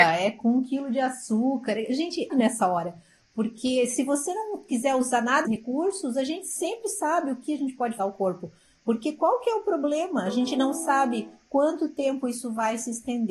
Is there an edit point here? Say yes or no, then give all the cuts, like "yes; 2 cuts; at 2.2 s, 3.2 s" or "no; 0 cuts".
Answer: yes; 3 cuts; at 2.3 s, 5.4 s, 8.0 s